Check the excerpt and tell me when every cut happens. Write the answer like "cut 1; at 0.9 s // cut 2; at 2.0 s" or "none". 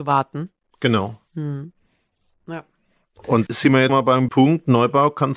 cut 1; at 3.5 s // cut 2; at 3.9 s // cut 3; at 4.3 s